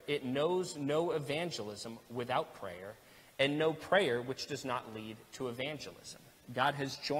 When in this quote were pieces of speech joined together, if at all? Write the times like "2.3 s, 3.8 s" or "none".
none